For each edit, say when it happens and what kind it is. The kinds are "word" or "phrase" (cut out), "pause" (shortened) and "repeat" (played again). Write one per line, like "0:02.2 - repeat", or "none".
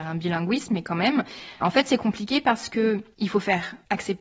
0:01.6 - word